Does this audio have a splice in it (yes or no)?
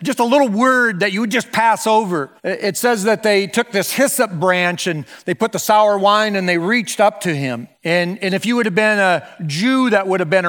yes